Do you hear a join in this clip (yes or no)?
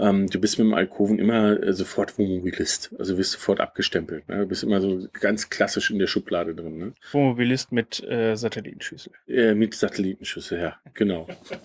no